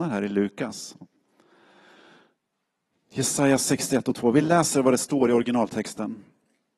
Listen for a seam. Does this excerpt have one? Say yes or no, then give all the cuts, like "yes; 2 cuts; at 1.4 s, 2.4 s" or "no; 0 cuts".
no; 0 cuts